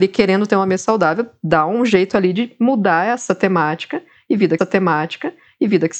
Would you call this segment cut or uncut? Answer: cut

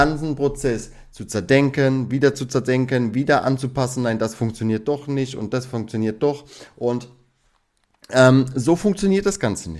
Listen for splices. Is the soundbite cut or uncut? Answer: uncut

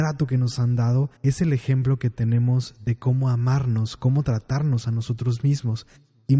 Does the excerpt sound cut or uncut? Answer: cut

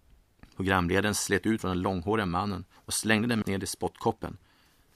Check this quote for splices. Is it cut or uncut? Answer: cut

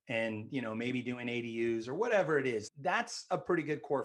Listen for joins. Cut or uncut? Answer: cut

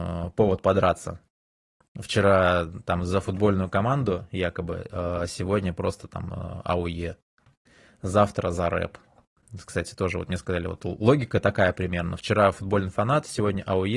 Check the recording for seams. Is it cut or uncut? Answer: uncut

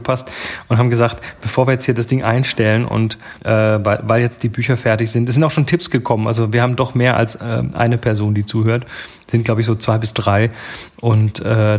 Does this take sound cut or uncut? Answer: cut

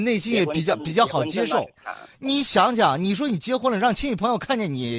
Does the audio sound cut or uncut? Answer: uncut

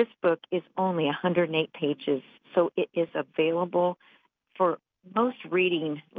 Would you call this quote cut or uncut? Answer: uncut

